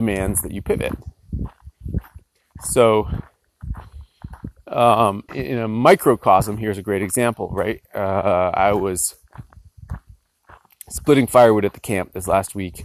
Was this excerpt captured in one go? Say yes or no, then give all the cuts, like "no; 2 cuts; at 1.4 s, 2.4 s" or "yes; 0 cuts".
no; 1 cut; at 5.3 s